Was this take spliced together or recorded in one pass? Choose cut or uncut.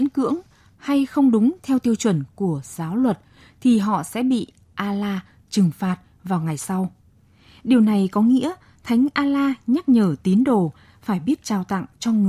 uncut